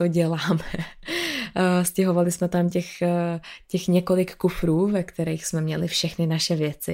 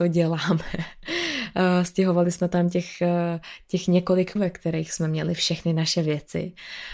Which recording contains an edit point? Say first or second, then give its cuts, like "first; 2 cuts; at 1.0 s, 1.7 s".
second; 1 cut; at 4.4 s